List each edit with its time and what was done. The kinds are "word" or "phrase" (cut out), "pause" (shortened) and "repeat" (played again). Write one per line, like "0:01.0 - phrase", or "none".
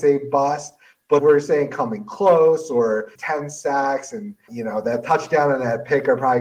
0:01.2 - word
0:03.2 - word